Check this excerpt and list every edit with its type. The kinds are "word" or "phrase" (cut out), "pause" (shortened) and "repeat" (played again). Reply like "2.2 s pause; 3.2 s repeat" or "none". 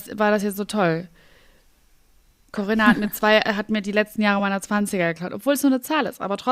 none